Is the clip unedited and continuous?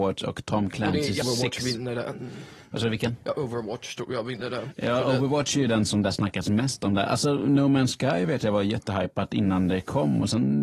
no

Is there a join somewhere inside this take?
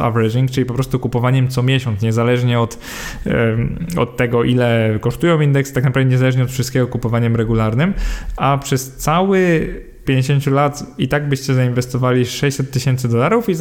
yes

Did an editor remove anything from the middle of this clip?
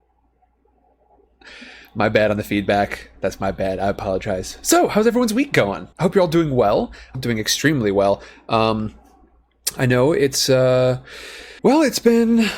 yes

